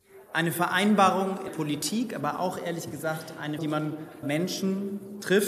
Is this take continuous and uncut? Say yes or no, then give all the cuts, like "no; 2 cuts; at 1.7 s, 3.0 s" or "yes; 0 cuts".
no; 3 cuts; at 1.5 s, 3.6 s, 4.2 s